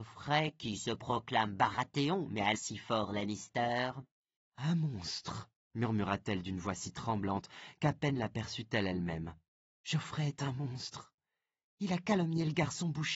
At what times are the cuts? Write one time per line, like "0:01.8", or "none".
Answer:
0:02.5